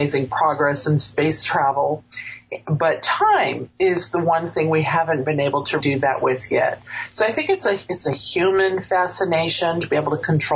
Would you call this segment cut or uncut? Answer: cut